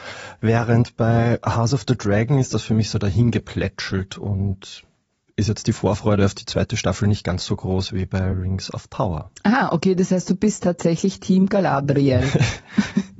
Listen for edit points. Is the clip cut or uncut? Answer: uncut